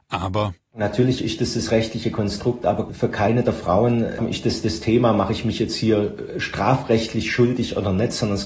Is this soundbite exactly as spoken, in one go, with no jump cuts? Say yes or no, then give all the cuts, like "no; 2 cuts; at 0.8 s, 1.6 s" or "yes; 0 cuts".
yes; 0 cuts